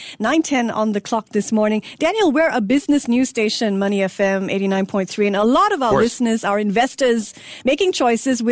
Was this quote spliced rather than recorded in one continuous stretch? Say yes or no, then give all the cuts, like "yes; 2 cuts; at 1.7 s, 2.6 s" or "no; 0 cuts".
no; 0 cuts